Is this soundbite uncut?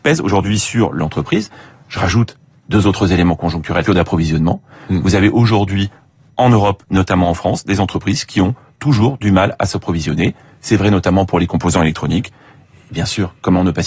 no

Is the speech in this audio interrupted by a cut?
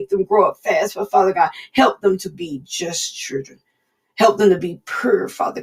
no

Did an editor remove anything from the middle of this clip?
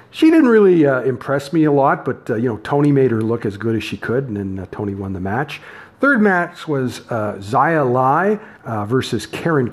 yes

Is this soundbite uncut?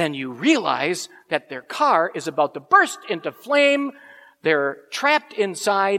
yes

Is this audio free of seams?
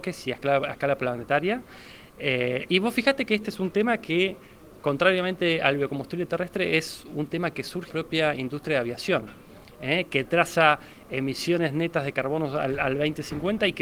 no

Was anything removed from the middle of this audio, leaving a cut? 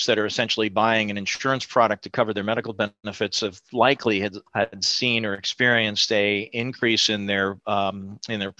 yes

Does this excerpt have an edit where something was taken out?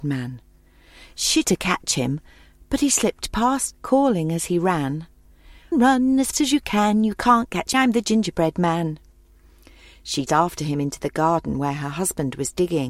yes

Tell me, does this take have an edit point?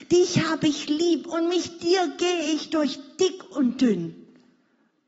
no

